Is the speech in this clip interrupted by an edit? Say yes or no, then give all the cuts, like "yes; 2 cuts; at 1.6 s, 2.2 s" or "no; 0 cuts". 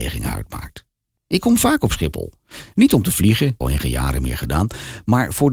yes; 1 cut; at 3.6 s